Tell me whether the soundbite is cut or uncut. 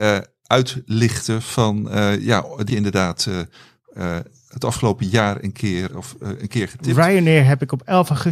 cut